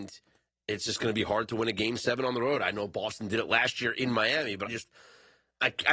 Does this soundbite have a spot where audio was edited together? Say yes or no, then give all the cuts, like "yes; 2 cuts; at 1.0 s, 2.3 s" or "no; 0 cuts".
yes; 1 cut; at 4.7 s